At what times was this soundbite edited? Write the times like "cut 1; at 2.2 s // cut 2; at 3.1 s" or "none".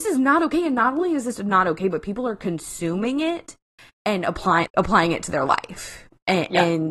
cut 1; at 4.7 s